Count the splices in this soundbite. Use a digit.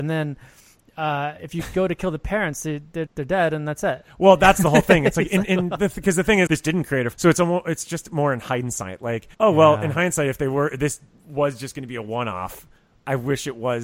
4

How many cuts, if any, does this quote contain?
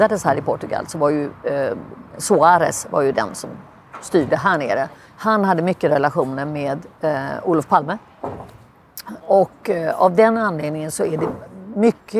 2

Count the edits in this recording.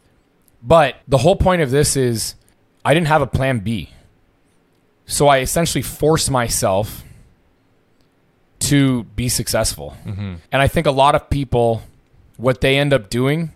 3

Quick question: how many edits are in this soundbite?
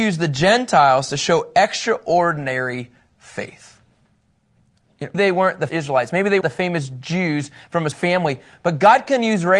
4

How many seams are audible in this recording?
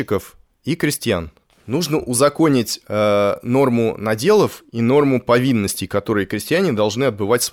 1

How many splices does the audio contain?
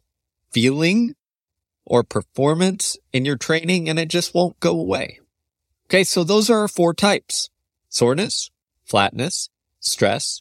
0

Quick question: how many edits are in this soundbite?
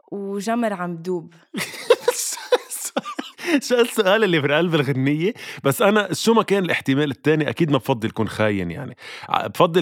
0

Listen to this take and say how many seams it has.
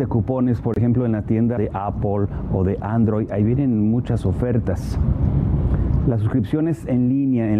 1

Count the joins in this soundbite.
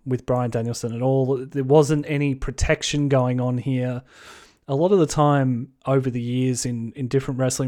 0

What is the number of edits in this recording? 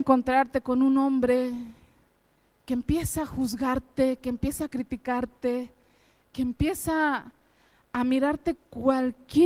0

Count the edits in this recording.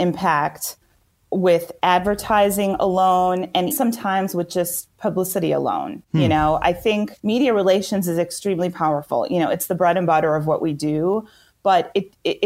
2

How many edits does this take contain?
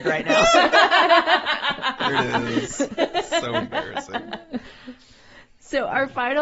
1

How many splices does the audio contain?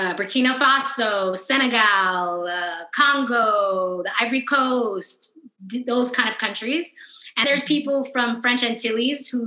1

